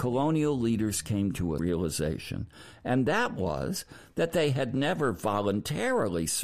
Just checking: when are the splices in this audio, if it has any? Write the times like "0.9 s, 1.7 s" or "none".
1.6 s